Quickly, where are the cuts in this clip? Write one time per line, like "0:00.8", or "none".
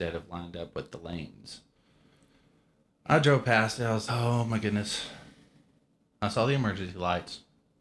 0:04.1